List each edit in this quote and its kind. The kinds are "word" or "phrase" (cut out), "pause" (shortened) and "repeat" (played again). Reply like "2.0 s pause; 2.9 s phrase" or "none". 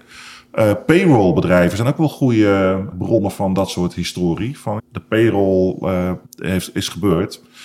2.9 s word; 4.8 s word; 6.2 s pause